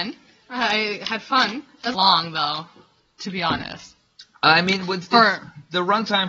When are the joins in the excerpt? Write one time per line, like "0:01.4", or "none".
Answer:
0:01.9